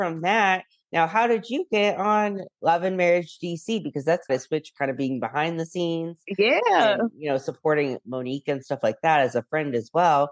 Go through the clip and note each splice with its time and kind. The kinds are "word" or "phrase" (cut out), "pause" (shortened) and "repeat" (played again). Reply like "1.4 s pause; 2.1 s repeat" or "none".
4.3 s word